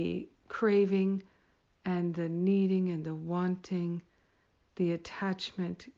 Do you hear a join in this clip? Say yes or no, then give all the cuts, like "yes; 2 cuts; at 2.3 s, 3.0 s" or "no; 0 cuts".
no; 0 cuts